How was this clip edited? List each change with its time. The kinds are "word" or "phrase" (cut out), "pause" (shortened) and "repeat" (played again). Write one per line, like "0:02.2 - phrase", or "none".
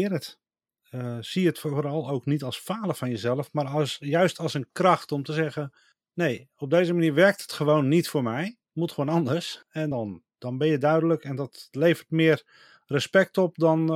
none